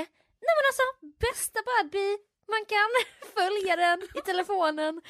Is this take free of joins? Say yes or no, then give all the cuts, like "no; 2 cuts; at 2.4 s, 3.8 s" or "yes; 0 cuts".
yes; 0 cuts